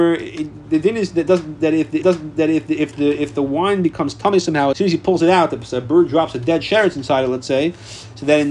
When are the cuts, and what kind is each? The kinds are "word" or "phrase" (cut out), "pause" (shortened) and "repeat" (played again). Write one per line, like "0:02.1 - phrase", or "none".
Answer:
0:02.0 - repeat
0:04.7 - word